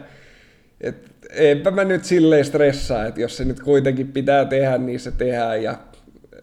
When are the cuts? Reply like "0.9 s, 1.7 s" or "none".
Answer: none